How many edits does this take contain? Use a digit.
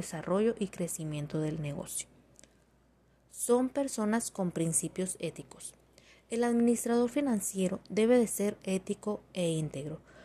0